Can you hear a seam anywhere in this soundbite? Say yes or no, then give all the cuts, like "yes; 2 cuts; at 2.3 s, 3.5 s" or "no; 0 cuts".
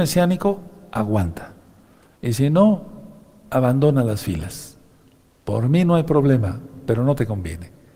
no; 0 cuts